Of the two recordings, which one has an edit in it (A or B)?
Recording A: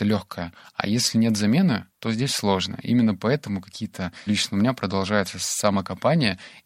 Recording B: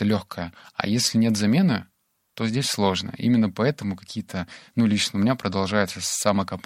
A